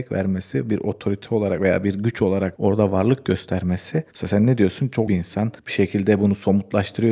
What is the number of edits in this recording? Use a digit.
3